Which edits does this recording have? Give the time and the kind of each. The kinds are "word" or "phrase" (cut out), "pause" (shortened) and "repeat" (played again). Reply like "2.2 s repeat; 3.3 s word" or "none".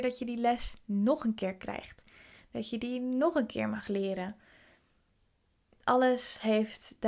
none